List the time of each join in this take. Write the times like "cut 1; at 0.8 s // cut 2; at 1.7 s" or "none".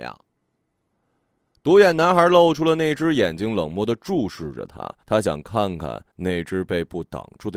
cut 1; at 5.0 s // cut 2; at 6.1 s